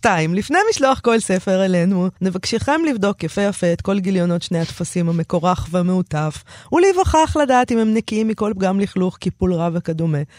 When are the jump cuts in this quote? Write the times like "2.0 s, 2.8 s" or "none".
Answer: 2.2 s